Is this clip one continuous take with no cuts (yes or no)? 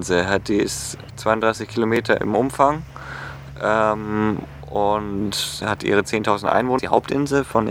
no